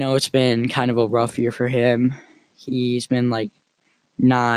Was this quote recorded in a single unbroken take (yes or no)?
yes